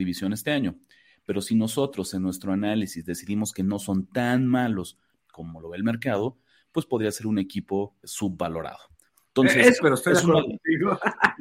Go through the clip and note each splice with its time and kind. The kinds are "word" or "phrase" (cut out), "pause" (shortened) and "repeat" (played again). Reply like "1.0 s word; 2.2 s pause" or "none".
8.0 s word; 9.8 s phrase